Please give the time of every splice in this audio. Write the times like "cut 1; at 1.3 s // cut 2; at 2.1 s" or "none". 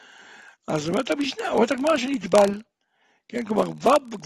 none